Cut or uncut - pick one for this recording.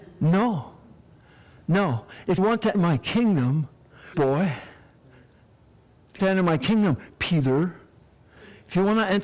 cut